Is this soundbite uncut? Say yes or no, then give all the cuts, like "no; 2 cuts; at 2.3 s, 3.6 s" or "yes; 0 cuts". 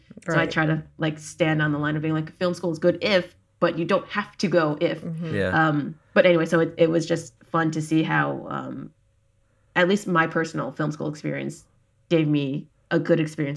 yes; 0 cuts